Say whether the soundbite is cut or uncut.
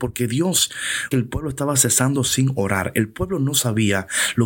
cut